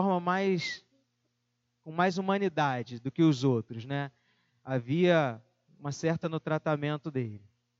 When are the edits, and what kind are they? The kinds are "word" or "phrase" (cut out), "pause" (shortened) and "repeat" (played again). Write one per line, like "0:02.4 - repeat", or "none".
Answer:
0:06.2 - word